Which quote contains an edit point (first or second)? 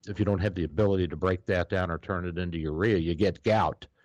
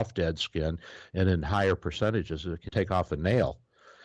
second